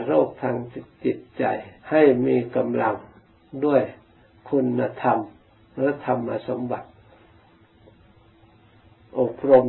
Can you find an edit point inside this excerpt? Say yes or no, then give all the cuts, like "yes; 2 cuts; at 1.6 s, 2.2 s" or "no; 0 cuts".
yes; 1 cut; at 1.8 s